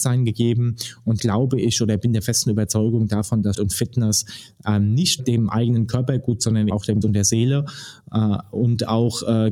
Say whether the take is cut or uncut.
cut